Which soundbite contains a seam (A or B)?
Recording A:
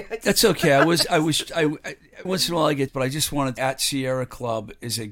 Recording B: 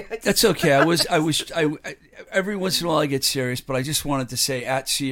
A